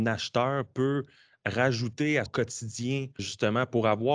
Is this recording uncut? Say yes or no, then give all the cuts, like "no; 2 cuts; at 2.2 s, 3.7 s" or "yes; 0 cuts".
no; 2 cuts; at 2.3 s, 3.2 s